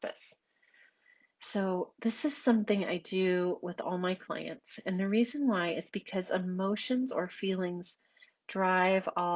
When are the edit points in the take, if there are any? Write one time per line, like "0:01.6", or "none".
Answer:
none